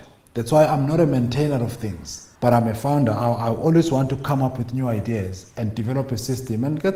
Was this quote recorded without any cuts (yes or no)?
no